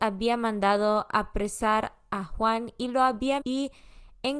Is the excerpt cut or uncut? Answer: cut